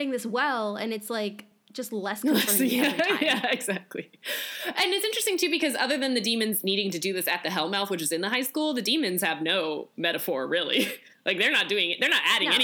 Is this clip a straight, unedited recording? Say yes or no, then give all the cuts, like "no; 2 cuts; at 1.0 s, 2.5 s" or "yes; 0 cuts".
yes; 0 cuts